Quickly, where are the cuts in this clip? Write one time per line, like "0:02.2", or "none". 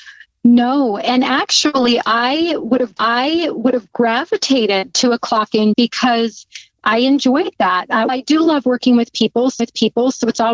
0:03.0
0:05.7
0:06.7
0:08.1
0:09.6